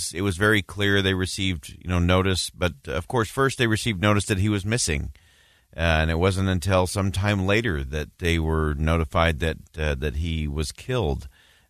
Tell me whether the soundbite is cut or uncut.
uncut